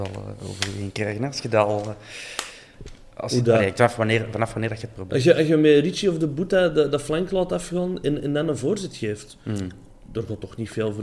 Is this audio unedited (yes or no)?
yes